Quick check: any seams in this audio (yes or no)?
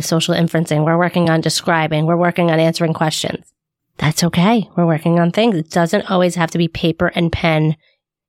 no